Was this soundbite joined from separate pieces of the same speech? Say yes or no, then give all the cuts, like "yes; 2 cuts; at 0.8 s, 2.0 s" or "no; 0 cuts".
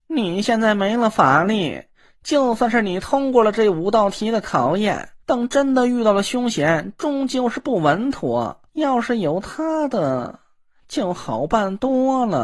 yes; 2 cuts; at 5.2 s, 8.7 s